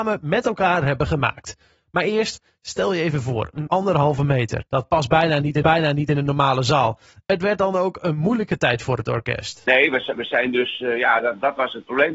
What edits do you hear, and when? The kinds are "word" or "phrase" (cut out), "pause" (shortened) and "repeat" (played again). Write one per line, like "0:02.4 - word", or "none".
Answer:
0:03.7 - phrase
0:04.7 - pause
0:05.6 - repeat